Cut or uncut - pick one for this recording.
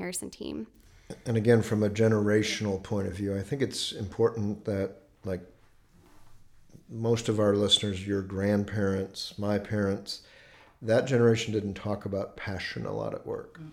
uncut